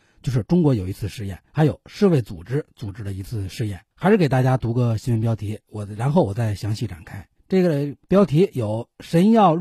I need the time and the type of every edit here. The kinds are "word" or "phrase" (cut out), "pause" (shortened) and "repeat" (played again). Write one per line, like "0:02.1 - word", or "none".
0:01.5 - pause
0:03.9 - pause
0:07.4 - pause
0:08.0 - pause